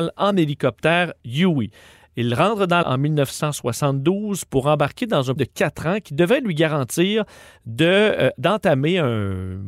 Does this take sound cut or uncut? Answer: cut